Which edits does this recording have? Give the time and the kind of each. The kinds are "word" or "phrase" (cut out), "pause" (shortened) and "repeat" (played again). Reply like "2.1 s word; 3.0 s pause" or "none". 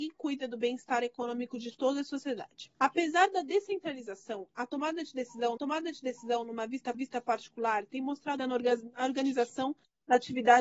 2.7 s pause; 5.6 s repeat; 6.9 s repeat; 8.4 s phrase